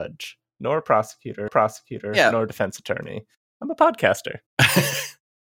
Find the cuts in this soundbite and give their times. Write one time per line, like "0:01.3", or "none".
0:01.5